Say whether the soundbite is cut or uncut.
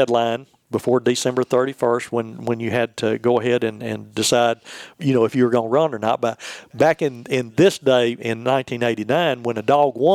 cut